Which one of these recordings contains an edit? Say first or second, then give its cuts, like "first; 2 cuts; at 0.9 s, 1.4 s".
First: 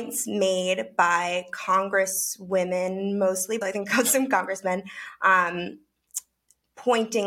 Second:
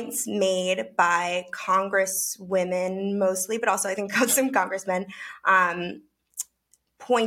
first; 1 cut; at 3.6 s